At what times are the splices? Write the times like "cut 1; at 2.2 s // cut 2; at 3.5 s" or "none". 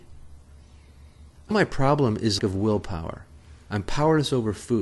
cut 1; at 1.5 s // cut 2; at 2.4 s